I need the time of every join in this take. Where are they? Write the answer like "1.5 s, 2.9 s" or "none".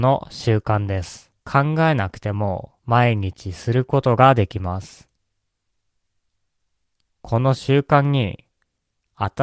1.4 s, 2.8 s